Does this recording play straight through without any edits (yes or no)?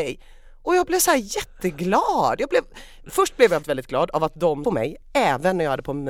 no